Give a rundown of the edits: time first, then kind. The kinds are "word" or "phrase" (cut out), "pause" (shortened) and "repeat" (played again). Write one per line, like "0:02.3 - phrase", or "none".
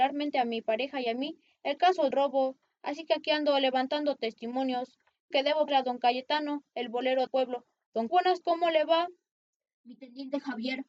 0:02.1 - word
0:05.3 - word
0:05.7 - word
0:07.3 - word
0:08.1 - word
0:08.4 - word